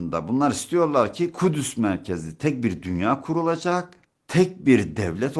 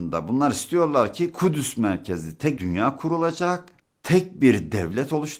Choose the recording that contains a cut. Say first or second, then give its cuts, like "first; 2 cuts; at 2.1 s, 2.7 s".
second; 1 cut; at 2.6 s